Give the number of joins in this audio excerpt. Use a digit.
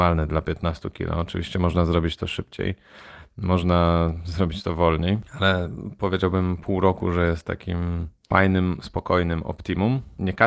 0